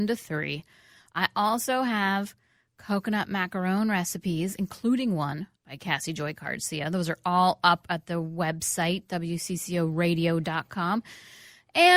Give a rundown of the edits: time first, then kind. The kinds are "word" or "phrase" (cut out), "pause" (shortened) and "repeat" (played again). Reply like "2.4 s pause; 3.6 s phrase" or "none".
5.6 s pause